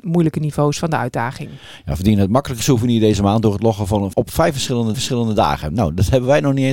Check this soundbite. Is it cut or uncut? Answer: cut